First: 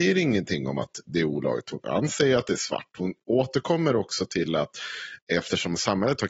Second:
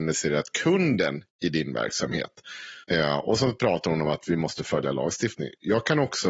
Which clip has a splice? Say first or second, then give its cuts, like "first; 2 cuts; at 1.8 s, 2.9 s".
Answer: second; 1 cut; at 2.8 s